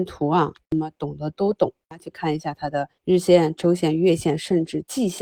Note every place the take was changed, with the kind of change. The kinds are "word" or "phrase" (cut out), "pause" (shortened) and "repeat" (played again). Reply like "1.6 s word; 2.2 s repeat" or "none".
1.8 s pause; 3.0 s pause

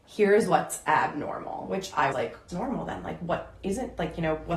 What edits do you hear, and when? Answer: 2.1 s word; 2.5 s phrase

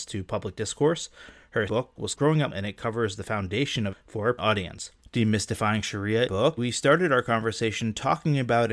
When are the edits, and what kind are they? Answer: 1.7 s word; 2.1 s word; 2.5 s word; 3.9 s word; 4.4 s word; 5.0 s pause; 6.3 s phrase; 6.6 s word

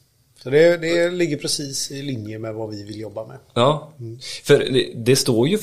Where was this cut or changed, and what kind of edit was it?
none

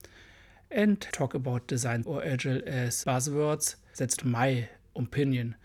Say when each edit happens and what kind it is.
1.1 s word; 2.0 s word; 3.0 s word; 4.2 s word

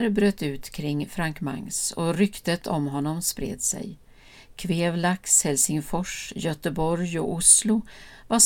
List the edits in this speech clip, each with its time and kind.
none

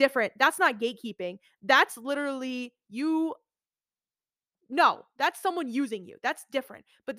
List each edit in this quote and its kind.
none

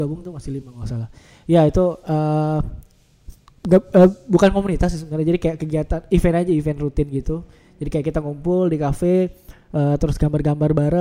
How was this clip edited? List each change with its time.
none

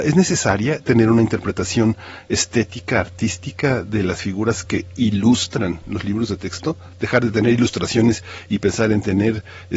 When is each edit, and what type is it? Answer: none

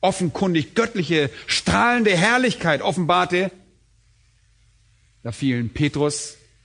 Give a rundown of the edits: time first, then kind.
none

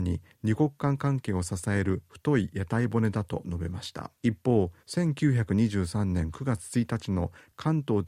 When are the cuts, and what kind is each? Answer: 4.2 s pause; 4.8 s pause

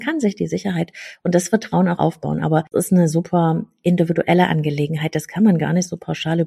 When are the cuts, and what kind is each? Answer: 2.0 s word; 2.7 s word

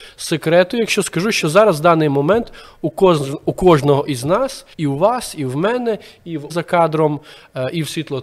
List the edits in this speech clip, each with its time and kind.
4.7 s pause; 6.5 s phrase

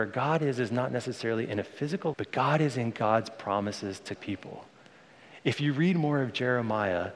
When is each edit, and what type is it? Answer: 2.1 s word; 4.1 s word

